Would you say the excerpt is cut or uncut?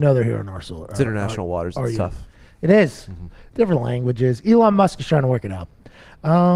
uncut